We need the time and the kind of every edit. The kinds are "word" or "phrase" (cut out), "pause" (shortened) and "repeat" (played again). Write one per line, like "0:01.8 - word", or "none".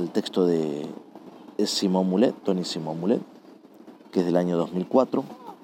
0:01.5 - pause
0:02.4 - pause
0:04.0 - pause